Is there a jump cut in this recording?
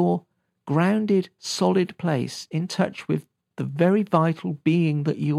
no; 0 cuts

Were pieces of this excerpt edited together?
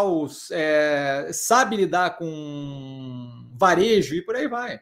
no; 0 cuts

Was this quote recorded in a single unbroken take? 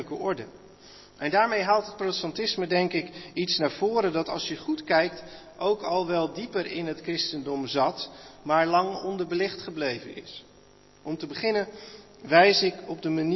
yes; 0 cuts

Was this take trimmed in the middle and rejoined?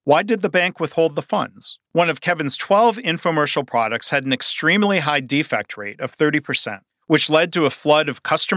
yes; 2 cuts; at 1.9 s, 6.9 s

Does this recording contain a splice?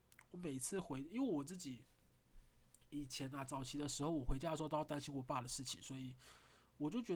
yes; 1 cut; at 2.7 s

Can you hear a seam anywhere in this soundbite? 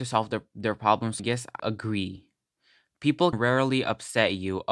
yes; 3 cuts; at 1.2 s, 1.6 s, 3.3 s

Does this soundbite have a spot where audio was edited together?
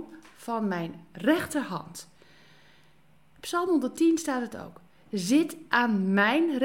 no; 0 cuts

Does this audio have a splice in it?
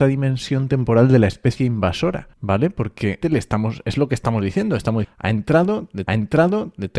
yes; 4 cuts; at 2.3 s, 3.2 s, 5.0 s, 6.1 s

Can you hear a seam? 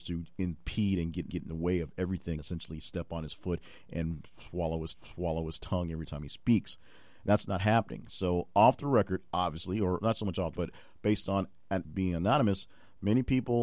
yes; 5 cuts; at 1.3 s, 2.4 s, 4.9 s, 10.6 s, 11.8 s

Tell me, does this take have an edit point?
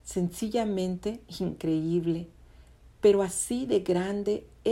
no; 0 cuts

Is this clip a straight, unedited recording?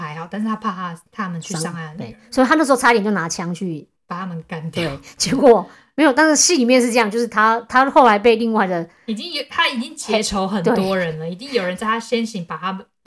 no; 1 cut; at 4.0 s

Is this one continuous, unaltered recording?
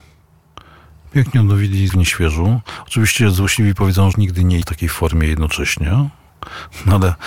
no; 3 cuts; at 1.9 s, 4.1 s, 4.6 s

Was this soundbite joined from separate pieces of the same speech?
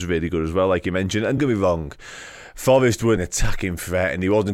yes; 2 cuts; at 1.4 s, 3.2 s

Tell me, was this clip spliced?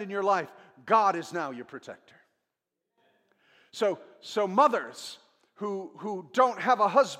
no; 0 cuts

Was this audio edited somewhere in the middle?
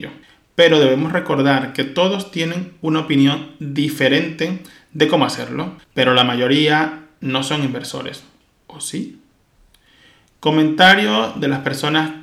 yes; 1 cut; at 5.8 s

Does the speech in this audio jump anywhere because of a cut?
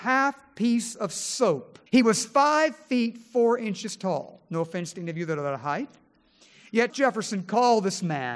yes; 2 cuts; at 1.9 s, 6.9 s

